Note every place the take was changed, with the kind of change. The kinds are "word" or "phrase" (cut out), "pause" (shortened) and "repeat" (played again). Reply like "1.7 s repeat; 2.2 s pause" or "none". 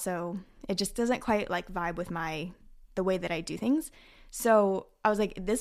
none